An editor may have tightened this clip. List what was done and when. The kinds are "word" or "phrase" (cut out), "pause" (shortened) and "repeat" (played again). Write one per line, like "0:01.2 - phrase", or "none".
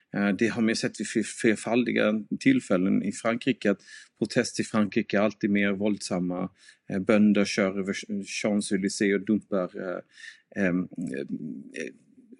none

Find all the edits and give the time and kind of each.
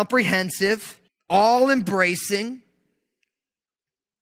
0:01.1 - pause

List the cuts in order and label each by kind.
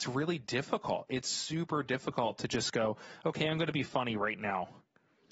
none

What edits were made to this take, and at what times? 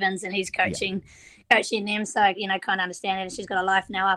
0:02.3 - word

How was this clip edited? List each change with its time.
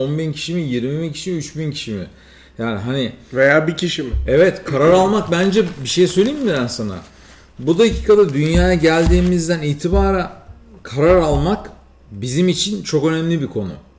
none

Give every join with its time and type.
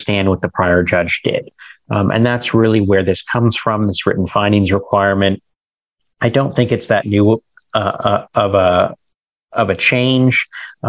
none

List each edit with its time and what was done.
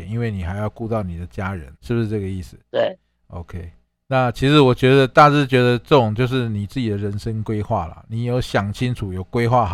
0:01.7 - pause
0:02.6 - pause
0:03.9 - pause

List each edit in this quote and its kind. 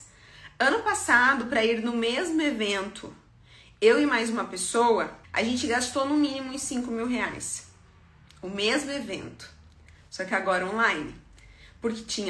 0:05.2 - pause

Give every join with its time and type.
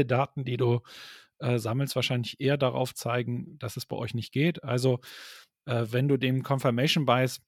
none

